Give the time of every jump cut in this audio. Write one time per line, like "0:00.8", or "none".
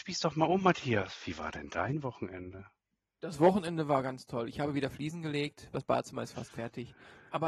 none